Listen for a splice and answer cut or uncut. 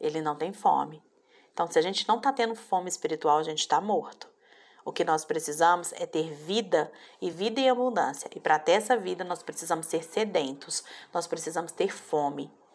uncut